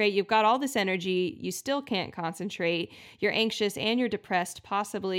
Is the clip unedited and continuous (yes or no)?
yes